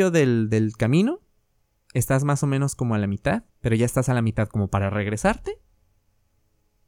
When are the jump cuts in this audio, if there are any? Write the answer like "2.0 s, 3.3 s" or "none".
1.5 s, 3.5 s